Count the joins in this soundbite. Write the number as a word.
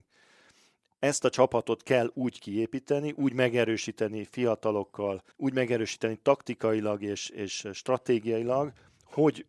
one